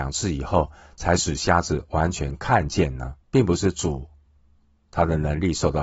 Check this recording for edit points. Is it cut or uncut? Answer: cut